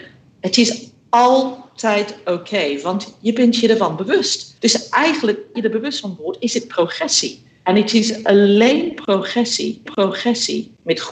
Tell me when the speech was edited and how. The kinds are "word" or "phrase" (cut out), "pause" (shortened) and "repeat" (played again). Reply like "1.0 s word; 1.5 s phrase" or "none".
4.6 s pause; 5.5 s word; 9.9 s repeat